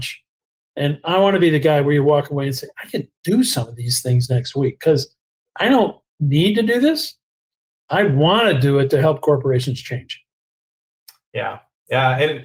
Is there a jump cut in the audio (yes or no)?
no